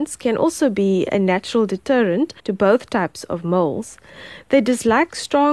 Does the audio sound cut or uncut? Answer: cut